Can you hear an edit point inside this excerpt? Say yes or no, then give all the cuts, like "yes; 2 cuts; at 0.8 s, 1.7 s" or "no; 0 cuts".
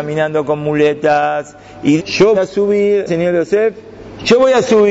yes; 3 cuts; at 2.0 s, 2.3 s, 3.1 s